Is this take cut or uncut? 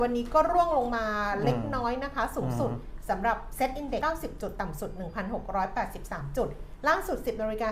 cut